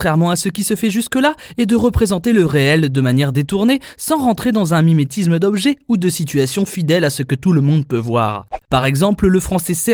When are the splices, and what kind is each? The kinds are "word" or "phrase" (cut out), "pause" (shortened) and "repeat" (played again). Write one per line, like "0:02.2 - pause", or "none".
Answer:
none